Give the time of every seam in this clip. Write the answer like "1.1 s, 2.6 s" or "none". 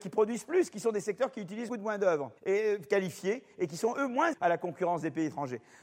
1.7 s, 2.4 s, 4.3 s